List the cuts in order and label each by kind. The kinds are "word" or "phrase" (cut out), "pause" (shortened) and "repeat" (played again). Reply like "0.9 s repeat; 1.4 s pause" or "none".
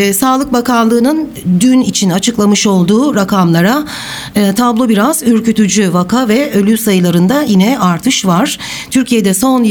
none